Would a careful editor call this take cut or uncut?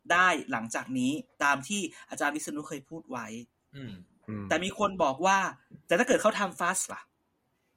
cut